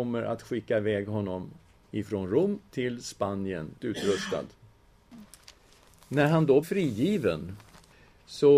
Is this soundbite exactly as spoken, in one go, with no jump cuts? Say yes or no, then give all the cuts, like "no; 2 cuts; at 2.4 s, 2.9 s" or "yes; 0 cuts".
no; 2 cuts; at 3.8 s, 6.6 s